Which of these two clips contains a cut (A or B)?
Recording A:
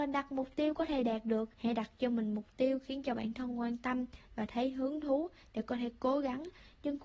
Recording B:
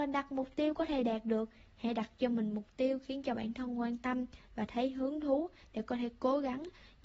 A